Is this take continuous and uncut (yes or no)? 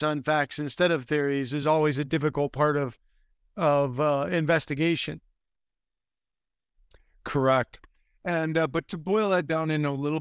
yes